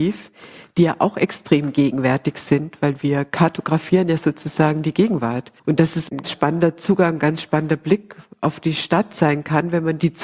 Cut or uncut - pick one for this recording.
cut